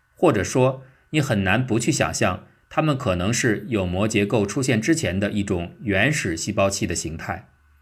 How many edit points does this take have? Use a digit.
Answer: 0